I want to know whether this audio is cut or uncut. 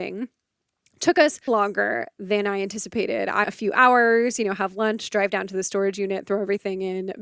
cut